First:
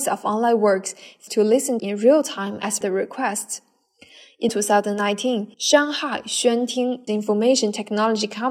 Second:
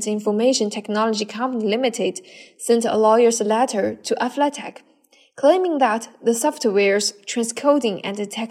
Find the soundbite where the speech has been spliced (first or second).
first